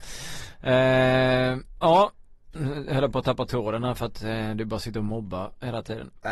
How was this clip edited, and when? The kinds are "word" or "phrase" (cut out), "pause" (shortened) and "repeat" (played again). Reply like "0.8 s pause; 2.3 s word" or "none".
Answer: none